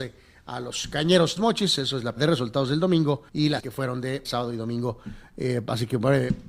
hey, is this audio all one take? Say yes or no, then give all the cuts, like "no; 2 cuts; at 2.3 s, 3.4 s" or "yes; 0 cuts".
no; 5 cuts; at 1.4 s, 2.2 s, 3.3 s, 3.6 s, 4.2 s